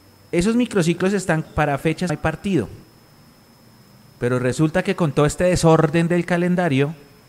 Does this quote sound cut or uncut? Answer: cut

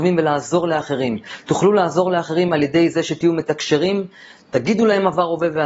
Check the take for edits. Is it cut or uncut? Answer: uncut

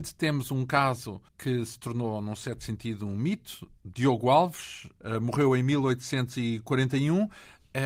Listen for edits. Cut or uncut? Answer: cut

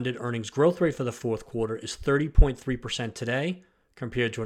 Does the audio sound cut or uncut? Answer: uncut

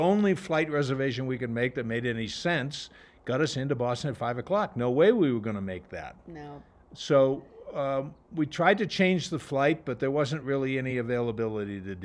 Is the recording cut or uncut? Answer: uncut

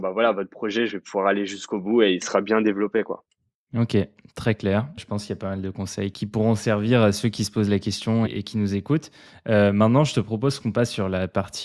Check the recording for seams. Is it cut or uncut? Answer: cut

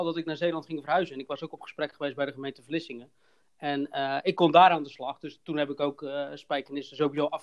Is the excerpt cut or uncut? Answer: uncut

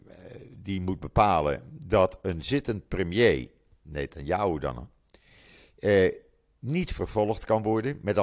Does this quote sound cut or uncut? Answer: uncut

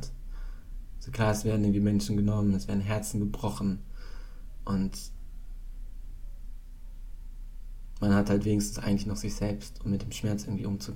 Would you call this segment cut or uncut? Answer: uncut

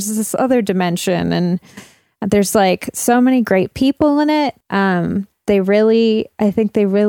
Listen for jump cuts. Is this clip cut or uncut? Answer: cut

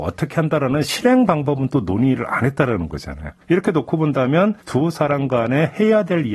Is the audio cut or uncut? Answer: cut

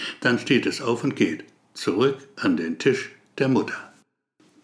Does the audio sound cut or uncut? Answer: uncut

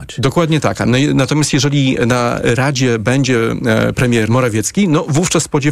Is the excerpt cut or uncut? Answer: cut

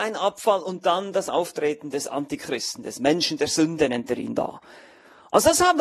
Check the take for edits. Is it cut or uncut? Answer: uncut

